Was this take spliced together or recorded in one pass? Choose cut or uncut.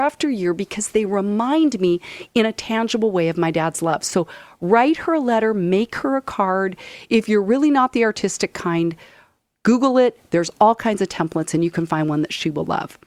uncut